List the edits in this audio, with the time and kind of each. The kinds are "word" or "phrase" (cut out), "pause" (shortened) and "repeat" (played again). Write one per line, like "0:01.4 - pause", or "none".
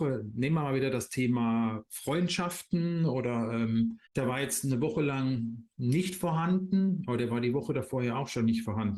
0:04.1 - pause